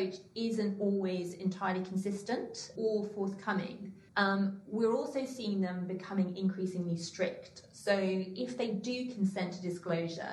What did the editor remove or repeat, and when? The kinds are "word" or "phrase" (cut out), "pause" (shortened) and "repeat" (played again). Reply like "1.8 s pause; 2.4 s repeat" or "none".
2.8 s word; 4.1 s pause

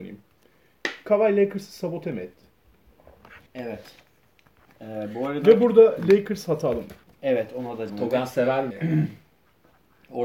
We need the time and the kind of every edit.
3.5 s pause; 7.0 s pause; 7.9 s word; 8.7 s word

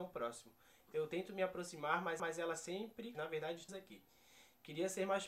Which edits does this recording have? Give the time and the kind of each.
2.2 s repeat; 3.1 s phrase; 3.7 s word

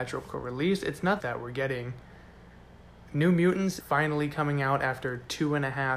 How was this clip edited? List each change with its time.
1.2 s phrase; 3.8 s word

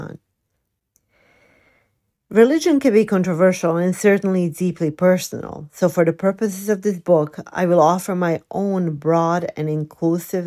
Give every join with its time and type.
none

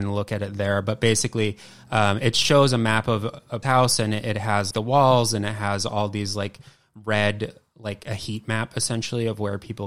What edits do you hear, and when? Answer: 3.6 s word; 4.7 s word

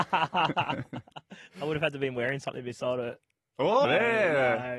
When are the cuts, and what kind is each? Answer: 3.8 s word

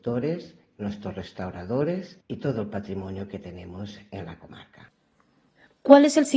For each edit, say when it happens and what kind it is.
2.2 s pause

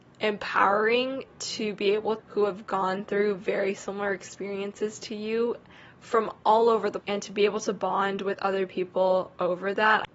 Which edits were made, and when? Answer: 2.2 s phrase; 7.0 s word

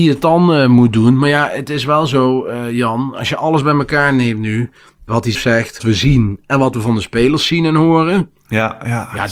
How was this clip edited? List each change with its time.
5.3 s word; 5.8 s word

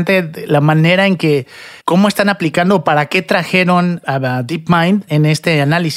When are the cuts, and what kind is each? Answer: 1.8 s pause

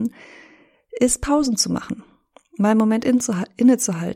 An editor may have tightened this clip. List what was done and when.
none

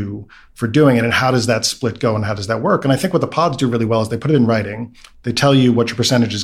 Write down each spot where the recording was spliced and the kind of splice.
none

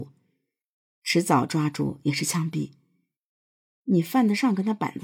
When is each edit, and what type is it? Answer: none

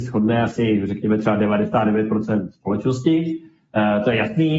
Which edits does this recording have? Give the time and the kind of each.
none

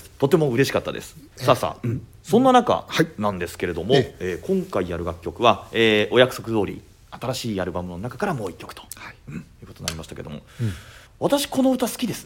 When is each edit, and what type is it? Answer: 1.3 s pause; 11.1 s pause

